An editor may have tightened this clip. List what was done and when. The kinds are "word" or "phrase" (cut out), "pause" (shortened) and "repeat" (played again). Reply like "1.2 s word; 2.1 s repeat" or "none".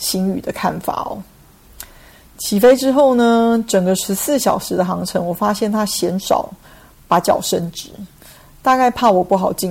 none